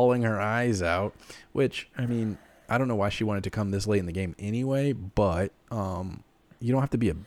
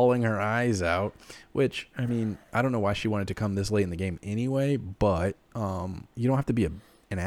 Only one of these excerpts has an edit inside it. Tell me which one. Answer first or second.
second